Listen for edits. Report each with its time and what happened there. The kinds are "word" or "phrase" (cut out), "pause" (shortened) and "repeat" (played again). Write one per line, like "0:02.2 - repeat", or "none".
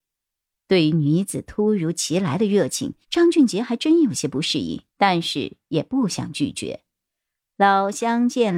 0:03.0 - pause
0:04.9 - pause